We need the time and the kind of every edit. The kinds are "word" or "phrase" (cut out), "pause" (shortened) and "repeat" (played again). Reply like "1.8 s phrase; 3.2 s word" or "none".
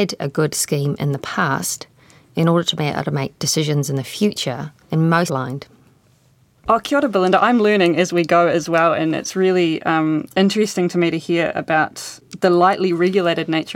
4.8 s pause; 5.3 s phrase